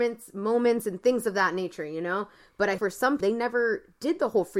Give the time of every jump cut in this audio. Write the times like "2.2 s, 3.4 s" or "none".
2.8 s, 3.2 s